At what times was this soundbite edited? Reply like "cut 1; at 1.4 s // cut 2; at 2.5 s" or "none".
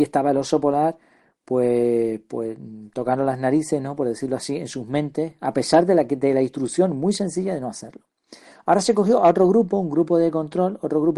none